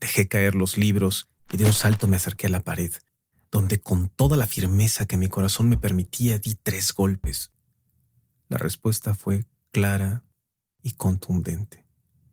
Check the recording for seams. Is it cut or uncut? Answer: uncut